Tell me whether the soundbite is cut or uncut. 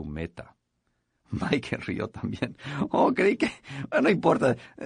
uncut